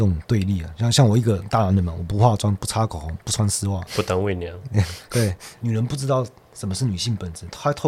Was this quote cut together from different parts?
no; 0 cuts

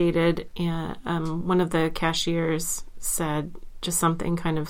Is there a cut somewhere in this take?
no; 0 cuts

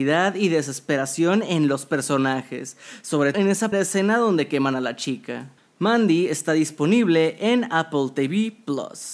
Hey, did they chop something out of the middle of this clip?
yes; 3 cuts; at 3.3 s, 3.7 s, 5.6 s

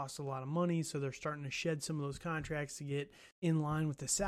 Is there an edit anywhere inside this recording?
yes; 1 cut; at 3.3 s

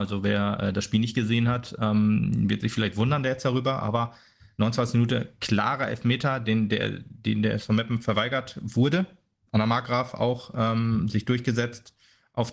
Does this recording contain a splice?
no; 0 cuts

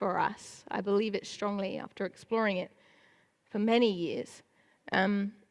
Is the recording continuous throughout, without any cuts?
yes; 0 cuts

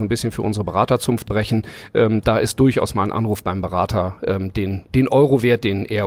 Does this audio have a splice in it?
yes; 1 cut; at 1.3 s

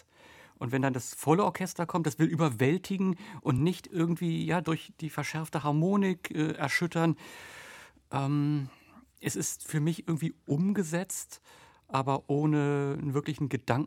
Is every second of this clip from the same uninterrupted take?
yes; 0 cuts

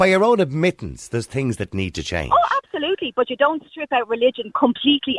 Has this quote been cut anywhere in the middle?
no; 0 cuts

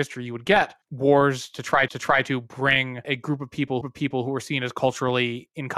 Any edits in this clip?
yes; 2 cuts; at 1.9 s, 3.8 s

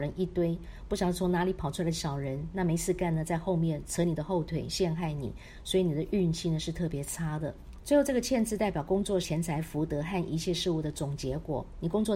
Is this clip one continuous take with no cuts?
no; 1 cut; at 9.2 s

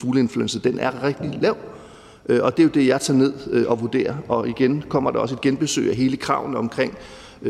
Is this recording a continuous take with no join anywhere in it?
yes; 0 cuts

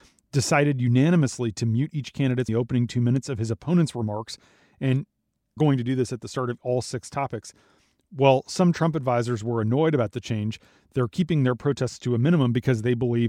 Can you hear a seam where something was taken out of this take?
yes; 2 cuts; at 2.5 s, 5.6 s

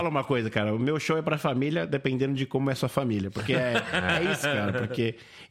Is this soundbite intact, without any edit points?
yes; 0 cuts

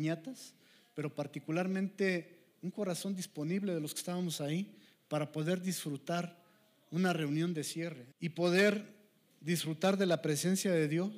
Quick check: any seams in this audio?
yes; 1 cut; at 8.1 s

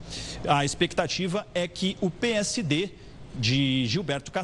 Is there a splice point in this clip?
no; 0 cuts

